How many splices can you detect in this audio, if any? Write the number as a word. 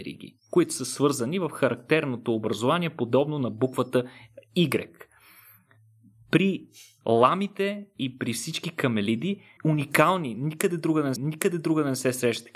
two